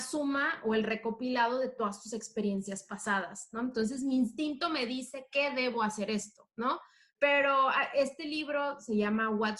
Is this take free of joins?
yes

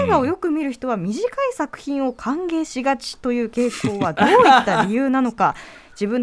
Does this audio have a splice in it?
no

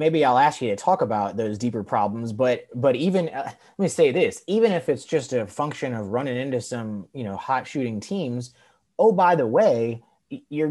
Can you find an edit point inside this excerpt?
no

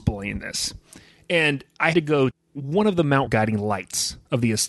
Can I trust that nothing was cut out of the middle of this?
no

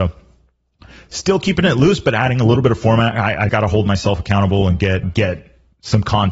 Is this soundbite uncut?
no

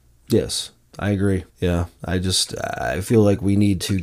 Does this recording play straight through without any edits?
no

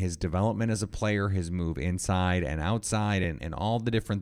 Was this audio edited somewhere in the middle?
no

